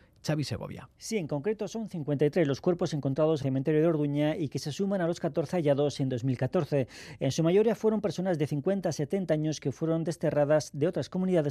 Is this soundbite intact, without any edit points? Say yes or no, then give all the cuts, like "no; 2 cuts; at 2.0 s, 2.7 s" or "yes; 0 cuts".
no; 2 cuts; at 0.9 s, 3.4 s